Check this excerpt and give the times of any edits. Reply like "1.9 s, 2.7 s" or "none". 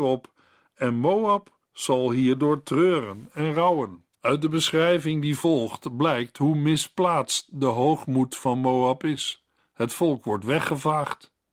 1.6 s, 4.1 s, 9.6 s